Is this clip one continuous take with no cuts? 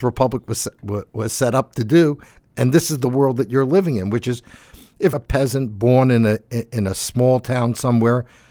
no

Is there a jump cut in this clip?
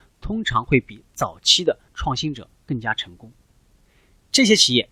yes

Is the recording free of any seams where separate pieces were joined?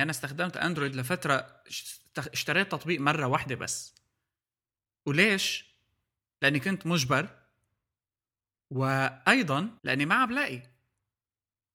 no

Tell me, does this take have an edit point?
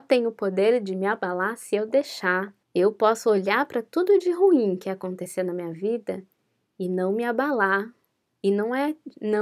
yes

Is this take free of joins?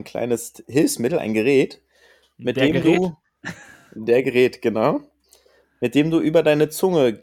yes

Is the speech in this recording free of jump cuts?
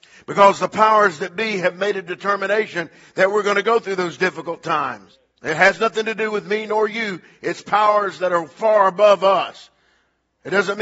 yes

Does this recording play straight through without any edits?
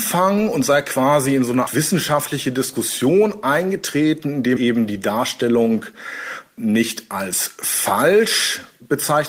no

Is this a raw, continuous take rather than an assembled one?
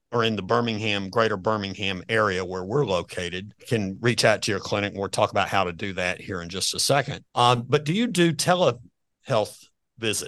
no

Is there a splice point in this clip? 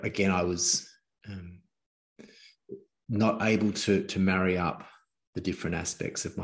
no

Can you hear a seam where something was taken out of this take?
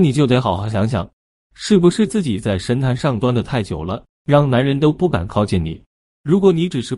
no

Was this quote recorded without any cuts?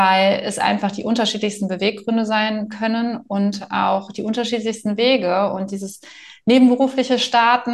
yes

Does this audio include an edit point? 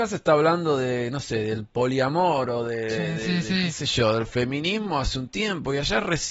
no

